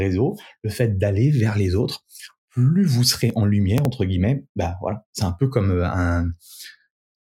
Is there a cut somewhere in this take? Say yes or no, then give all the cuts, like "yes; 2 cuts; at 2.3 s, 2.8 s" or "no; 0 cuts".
no; 0 cuts